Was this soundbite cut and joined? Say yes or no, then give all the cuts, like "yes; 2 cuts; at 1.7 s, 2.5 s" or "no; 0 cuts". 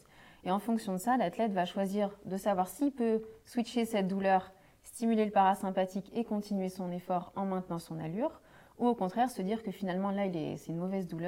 no; 0 cuts